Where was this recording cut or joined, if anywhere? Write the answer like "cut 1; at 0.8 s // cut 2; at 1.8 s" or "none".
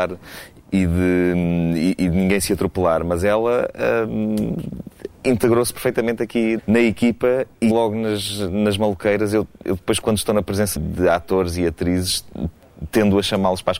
cut 1; at 6.6 s // cut 2; at 7.7 s // cut 3; at 10.0 s // cut 4; at 10.8 s